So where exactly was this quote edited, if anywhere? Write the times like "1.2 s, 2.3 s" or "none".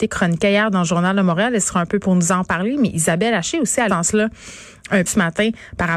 2.0 s, 3.9 s, 5.1 s

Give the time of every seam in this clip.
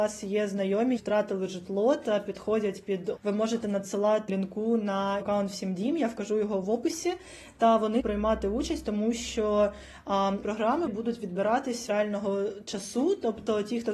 1.0 s, 3.2 s, 4.3 s, 5.2 s, 6.6 s, 8.0 s, 10.4 s, 10.9 s, 11.9 s

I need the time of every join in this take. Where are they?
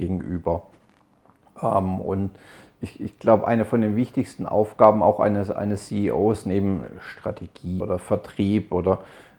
7.8 s

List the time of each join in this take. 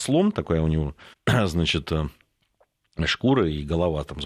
1.1 s

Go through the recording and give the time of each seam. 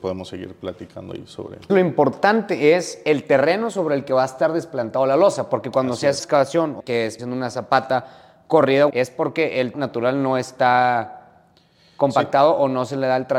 1.7 s, 6.2 s, 6.8 s, 7.2 s, 8.9 s, 9.7 s

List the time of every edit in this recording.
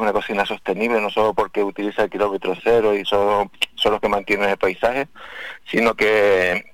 none

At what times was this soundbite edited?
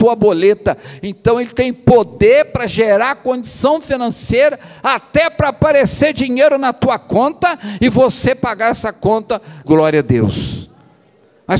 9.6 s

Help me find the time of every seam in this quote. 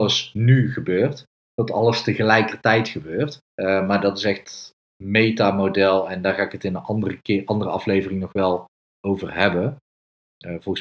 3.4 s

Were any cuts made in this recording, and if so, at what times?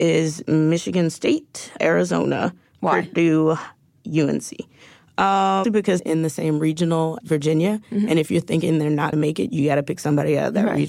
1.8 s, 5.6 s, 6.0 s, 7.2 s, 9.1 s

